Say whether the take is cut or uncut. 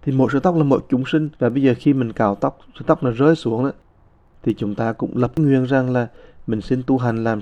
cut